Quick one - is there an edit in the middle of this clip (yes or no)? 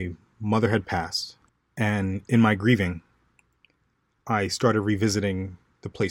no